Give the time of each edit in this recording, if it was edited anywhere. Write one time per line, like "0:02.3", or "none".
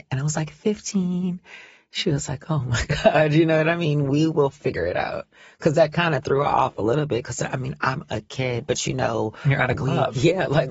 none